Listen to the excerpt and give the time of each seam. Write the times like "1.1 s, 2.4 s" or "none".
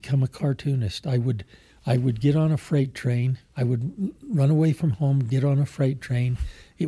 3.5 s